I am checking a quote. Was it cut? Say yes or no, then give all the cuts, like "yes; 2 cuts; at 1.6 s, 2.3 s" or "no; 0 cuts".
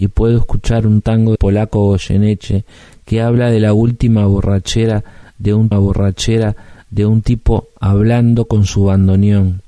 yes; 2 cuts; at 1.4 s, 5.7 s